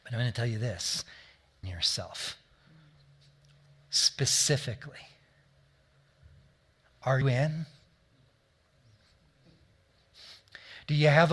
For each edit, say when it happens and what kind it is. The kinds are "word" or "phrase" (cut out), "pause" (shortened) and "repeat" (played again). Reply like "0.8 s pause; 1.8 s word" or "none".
1.6 s word; 7.2 s word

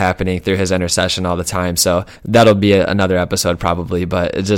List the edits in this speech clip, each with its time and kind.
2.1 s pause

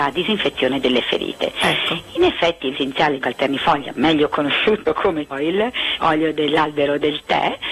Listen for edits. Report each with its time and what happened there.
2.7 s word; 3.2 s word; 4.3 s word; 5.3 s word; 6.0 s word

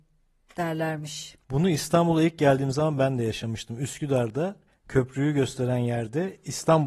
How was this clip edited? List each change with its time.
1.4 s pause; 4.7 s pause

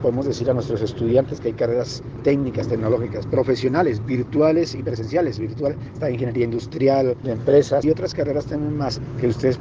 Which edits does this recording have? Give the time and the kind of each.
7.2 s word; 7.8 s phrase

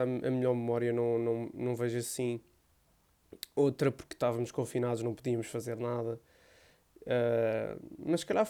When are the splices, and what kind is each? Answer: none

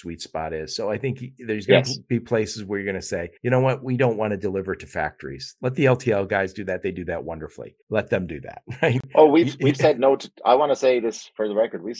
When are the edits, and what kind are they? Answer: 3.4 s pause; 7.8 s pause

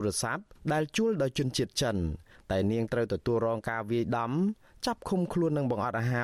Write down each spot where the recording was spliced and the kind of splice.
none

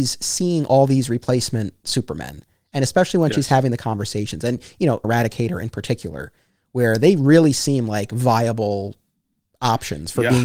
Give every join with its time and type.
5.0 s phrase

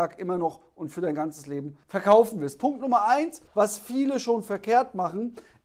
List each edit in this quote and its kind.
1.8 s pause; 3.5 s pause

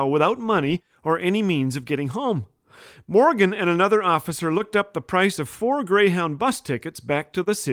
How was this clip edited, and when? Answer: none

